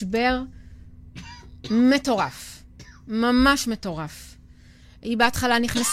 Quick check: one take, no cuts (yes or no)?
yes